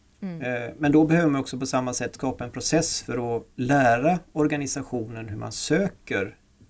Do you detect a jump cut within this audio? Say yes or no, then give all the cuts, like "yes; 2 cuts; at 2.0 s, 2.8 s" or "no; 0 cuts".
yes; 1 cut; at 3.5 s